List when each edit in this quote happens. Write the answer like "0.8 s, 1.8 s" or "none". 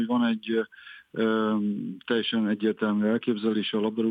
none